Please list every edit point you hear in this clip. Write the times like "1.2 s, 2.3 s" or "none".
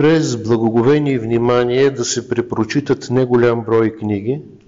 none